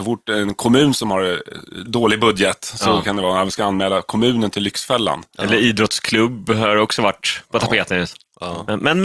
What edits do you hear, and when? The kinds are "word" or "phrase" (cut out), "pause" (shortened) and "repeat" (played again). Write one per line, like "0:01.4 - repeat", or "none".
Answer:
0:01.9 - word